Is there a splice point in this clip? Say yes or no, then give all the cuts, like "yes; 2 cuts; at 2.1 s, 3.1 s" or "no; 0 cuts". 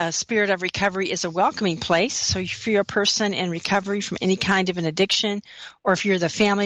no; 0 cuts